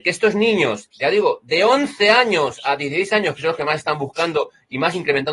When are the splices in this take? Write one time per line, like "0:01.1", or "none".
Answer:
none

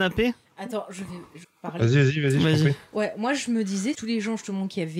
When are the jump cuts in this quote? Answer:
0:01.4
0:03.9

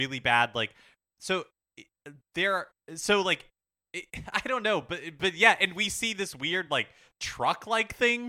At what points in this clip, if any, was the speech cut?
none

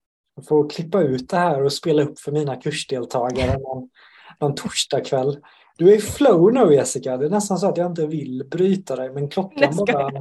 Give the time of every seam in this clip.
none

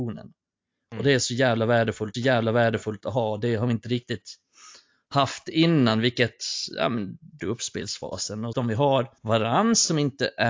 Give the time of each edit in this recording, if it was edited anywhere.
0:02.1
0:07.4
0:08.5
0:09.2

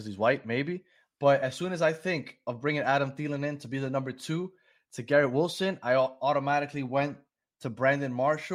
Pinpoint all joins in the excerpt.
none

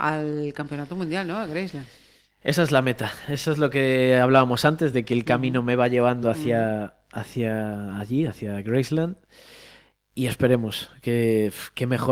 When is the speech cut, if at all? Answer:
none

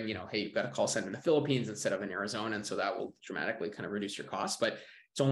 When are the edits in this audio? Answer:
none

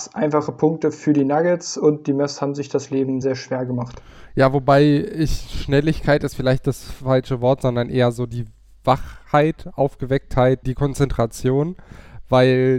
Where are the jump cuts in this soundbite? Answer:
0:03.2
0:10.6

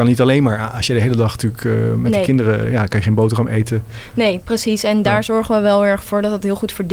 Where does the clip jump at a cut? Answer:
none

